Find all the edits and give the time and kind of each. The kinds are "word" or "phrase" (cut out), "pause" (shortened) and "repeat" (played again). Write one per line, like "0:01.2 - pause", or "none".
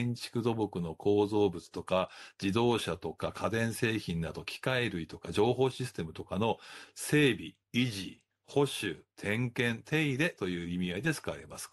0:07.6 - pause